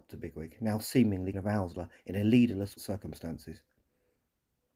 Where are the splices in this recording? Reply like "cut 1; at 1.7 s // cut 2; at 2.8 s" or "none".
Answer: cut 1; at 1.3 s // cut 2; at 2.8 s